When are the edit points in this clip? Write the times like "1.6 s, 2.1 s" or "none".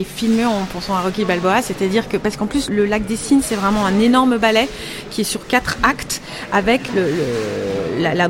2.7 s, 6.9 s